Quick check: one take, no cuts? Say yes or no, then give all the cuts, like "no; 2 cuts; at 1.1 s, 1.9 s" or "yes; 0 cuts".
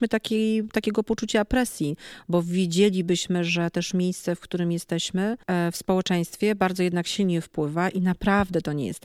no; 1 cut; at 5.4 s